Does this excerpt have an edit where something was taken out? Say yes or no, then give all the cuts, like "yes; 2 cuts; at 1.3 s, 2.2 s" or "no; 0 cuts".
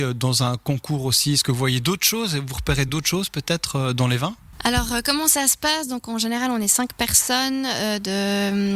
no; 0 cuts